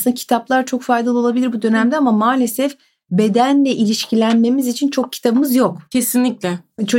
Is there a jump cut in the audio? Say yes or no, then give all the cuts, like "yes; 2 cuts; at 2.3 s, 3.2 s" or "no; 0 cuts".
no; 0 cuts